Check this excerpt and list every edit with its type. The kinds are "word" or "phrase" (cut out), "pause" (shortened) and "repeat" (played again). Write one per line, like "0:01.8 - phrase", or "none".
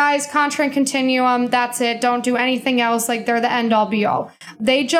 none

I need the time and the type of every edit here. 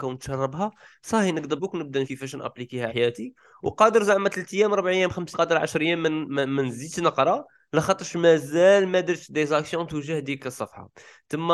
0:01.6 - word
0:02.0 - word
0:02.9 - word
0:05.3 - word

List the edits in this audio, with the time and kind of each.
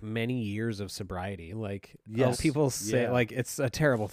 0:02.3 - word

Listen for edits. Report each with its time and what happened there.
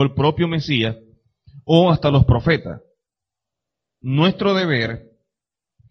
none

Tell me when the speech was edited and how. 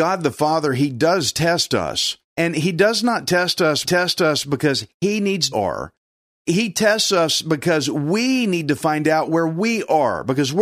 0:03.8 - repeat
0:05.5 - phrase

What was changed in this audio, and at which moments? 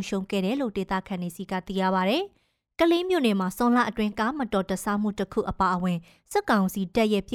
none

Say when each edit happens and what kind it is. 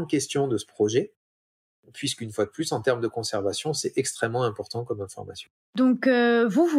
none

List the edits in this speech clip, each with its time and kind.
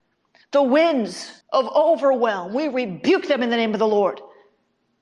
0:01.4 - pause

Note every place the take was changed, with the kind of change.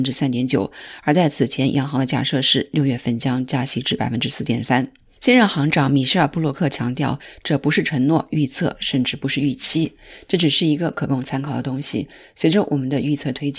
none

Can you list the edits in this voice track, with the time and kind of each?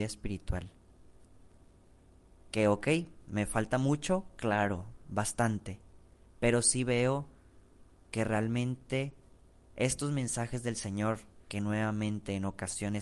none

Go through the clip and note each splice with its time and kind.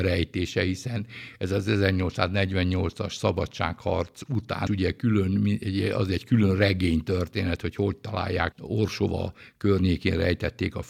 0:04.7 - word
0:08.5 - word

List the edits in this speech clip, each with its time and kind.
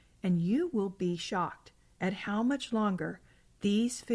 none

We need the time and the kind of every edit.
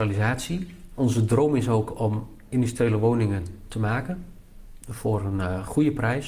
none

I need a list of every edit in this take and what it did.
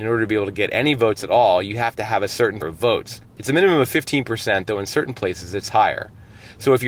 0:02.6 - phrase

